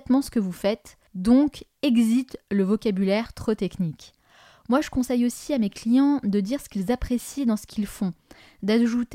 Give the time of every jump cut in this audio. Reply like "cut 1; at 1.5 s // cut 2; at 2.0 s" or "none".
cut 1; at 1.1 s